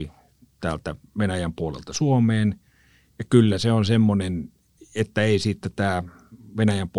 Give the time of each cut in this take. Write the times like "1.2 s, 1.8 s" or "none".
none